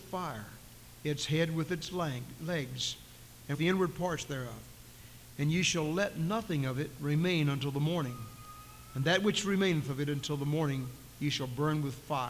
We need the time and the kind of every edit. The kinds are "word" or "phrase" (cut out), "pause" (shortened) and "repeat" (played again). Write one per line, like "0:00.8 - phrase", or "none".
0:03.5 - word